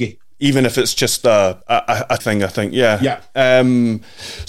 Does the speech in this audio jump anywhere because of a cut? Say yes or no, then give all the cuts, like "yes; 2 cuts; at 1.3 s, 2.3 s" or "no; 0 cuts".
yes; 2 cuts; at 1.6 s, 2.2 s